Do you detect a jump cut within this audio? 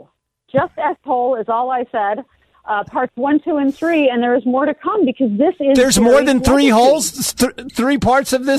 no; 0 cuts

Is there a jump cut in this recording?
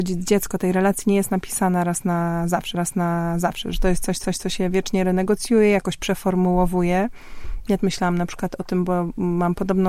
yes; 3 cuts; at 2.7 s, 4.2 s, 7.8 s

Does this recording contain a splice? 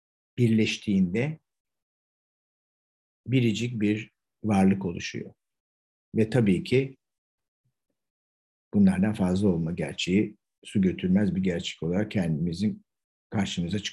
no; 0 cuts

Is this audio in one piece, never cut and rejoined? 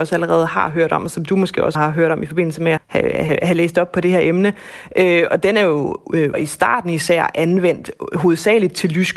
no; 4 cuts; at 1.7 s, 2.8 s, 5.3 s, 6.3 s

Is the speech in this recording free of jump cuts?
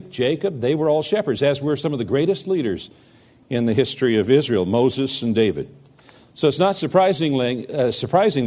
yes; 0 cuts

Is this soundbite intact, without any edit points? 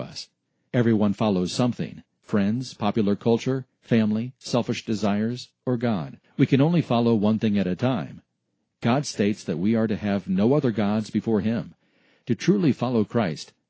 no; 1 cut; at 6.2 s

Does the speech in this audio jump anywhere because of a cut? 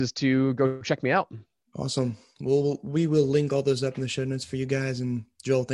no; 0 cuts

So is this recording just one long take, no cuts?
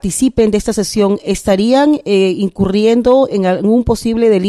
yes; 0 cuts

